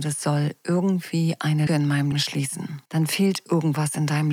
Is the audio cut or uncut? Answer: cut